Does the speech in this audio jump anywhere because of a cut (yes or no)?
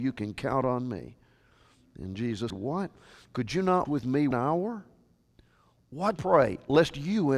yes